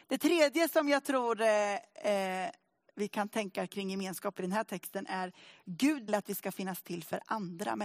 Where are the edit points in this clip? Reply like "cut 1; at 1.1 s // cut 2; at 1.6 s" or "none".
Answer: cut 1; at 6.1 s